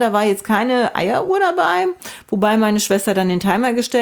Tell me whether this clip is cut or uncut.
uncut